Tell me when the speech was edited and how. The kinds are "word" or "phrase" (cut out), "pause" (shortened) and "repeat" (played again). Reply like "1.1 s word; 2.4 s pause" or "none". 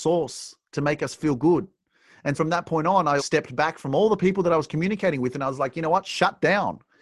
2.4 s word; 3.2 s word